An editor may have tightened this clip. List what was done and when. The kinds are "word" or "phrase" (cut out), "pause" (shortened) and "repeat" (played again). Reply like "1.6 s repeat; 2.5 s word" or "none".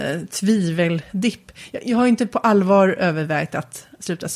none